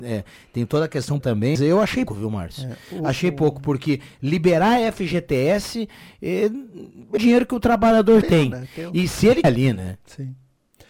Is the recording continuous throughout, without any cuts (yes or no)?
no